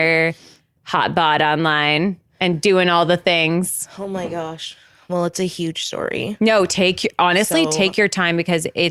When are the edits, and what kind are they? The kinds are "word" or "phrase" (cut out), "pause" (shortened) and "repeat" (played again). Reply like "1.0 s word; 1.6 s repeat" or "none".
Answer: none